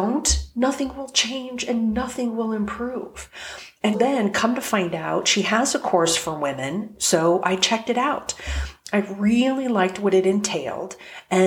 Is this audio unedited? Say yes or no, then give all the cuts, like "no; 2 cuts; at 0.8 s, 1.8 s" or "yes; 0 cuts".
no; 1 cut; at 3.9 s